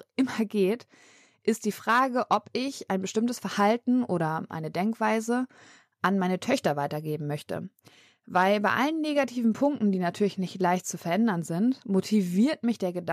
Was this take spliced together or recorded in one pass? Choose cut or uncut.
uncut